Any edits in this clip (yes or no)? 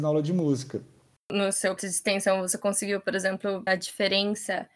yes